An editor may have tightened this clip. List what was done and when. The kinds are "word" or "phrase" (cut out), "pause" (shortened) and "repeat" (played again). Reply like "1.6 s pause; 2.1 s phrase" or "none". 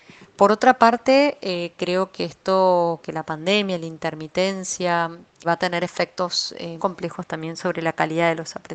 3.0 s word; 5.4 s word; 6.8 s word

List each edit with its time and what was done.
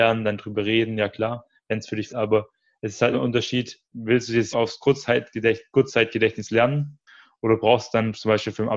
2.1 s word; 3.1 s word; 3.8 s pause; 4.5 s phrase

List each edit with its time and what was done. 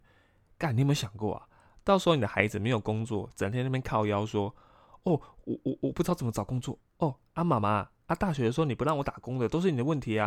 none

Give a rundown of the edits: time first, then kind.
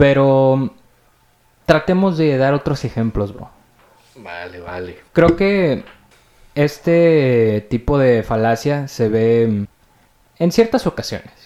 none

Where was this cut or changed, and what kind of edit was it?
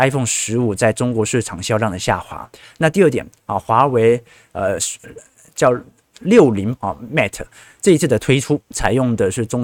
6.8 s word

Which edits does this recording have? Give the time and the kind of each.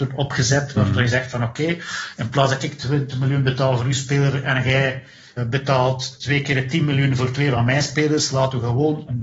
none

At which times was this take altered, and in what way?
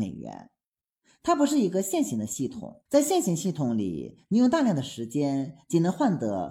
2.9 s pause

